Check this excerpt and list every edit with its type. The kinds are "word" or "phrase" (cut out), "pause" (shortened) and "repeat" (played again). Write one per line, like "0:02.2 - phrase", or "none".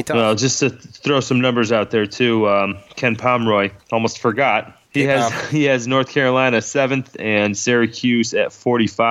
0:03.8 - pause
0:04.8 - pause

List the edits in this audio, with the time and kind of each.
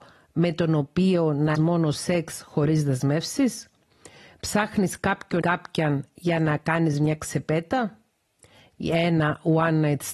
0:01.5 - word
0:05.4 - word

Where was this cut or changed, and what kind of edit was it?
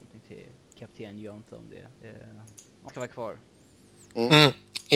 0:02.0 - pause
0:02.9 - word

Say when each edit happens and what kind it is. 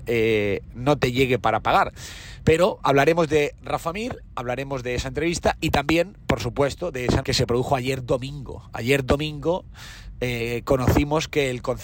0:07.2 - word

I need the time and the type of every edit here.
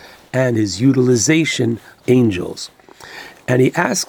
0:02.0 - word

